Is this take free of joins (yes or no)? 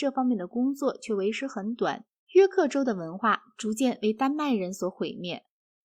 no